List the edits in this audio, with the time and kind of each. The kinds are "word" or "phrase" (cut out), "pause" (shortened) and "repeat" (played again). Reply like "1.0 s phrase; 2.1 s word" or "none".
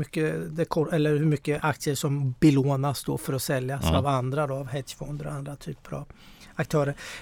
none